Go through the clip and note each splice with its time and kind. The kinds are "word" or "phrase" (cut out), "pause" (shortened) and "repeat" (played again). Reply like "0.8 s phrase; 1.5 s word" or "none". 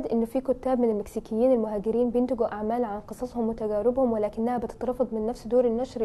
none